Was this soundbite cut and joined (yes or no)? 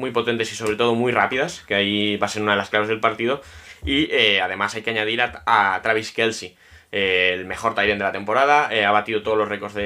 no